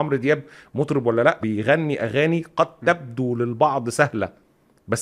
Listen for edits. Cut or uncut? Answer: cut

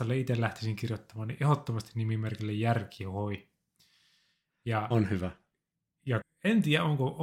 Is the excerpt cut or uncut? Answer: cut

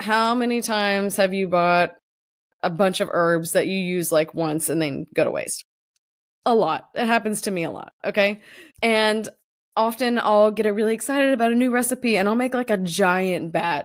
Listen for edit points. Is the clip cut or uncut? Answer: cut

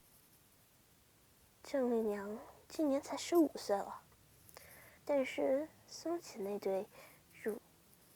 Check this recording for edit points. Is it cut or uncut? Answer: cut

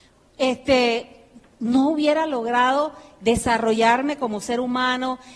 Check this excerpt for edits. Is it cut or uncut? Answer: uncut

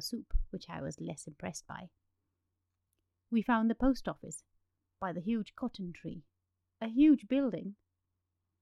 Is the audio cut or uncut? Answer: uncut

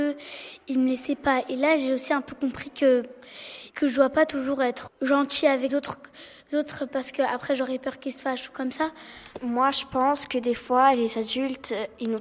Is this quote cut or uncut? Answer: cut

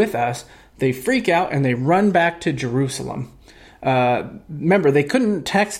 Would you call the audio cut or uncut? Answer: uncut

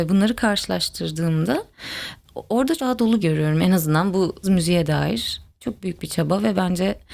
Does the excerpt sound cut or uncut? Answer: cut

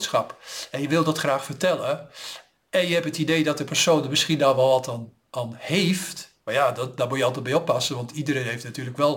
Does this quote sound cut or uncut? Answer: uncut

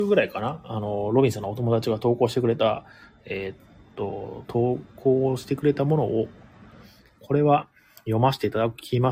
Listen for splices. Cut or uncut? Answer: uncut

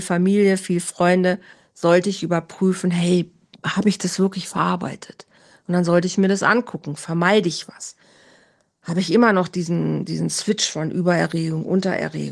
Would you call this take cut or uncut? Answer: uncut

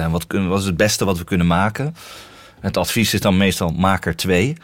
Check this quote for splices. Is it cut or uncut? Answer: uncut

